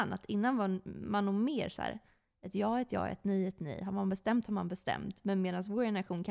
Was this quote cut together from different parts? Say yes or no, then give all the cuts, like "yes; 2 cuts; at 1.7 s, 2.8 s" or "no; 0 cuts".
no; 0 cuts